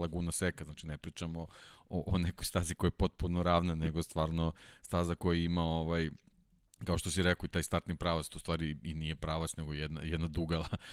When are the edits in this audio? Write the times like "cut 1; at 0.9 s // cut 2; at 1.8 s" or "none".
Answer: none

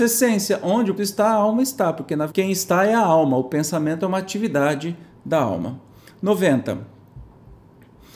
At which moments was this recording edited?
cut 1; at 1.0 s // cut 2; at 2.3 s

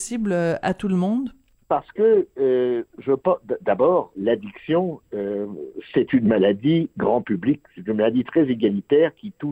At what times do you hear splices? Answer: cut 1; at 2.9 s // cut 2; at 4.1 s

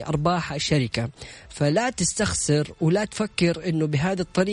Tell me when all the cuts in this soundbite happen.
none

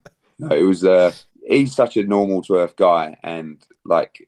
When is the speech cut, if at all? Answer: cut 1; at 1.8 s // cut 2; at 2.4 s

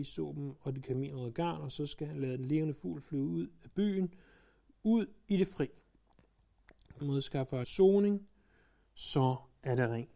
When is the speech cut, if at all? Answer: cut 1; at 7.0 s // cut 2; at 7.6 s

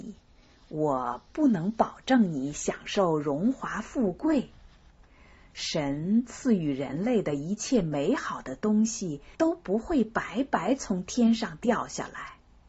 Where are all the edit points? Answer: cut 1; at 9.3 s

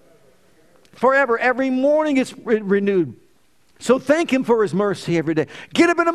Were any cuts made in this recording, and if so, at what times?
none

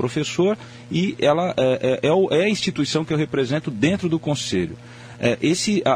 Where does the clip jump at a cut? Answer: none

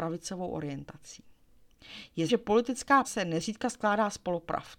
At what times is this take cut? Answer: cut 1; at 2.3 s // cut 2; at 3.0 s

